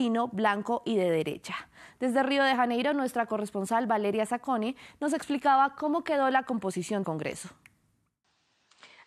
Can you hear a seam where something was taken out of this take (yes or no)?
yes